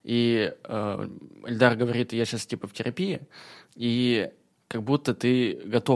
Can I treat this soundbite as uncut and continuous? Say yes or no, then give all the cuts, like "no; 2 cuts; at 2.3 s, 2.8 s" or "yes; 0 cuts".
yes; 0 cuts